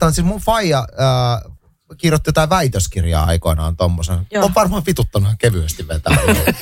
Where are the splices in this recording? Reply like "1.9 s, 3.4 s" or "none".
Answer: none

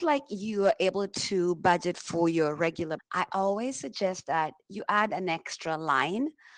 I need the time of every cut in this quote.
3.0 s

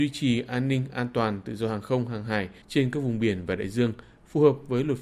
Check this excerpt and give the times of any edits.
2.6 s

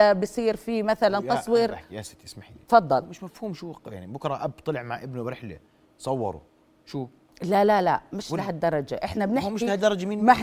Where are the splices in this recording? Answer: none

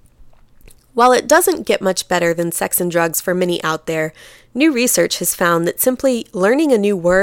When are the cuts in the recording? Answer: none

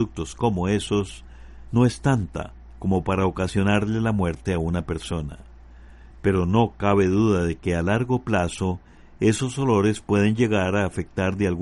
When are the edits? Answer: none

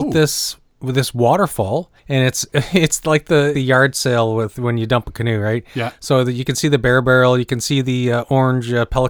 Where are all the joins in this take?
2.0 s, 3.5 s

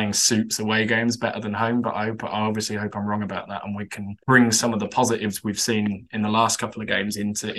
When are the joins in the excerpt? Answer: 4.2 s

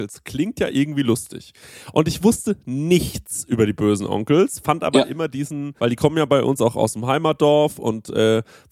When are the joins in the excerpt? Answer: 5.8 s

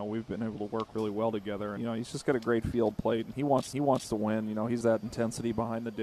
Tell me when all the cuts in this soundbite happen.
1.8 s, 2.9 s, 3.7 s, 4.8 s

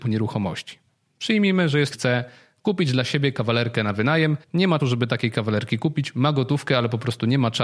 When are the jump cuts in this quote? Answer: 1.9 s, 4.4 s, 4.8 s

